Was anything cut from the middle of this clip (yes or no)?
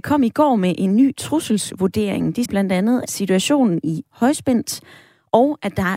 yes